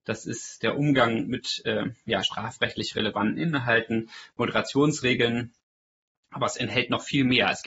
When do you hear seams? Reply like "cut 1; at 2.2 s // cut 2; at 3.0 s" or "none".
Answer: none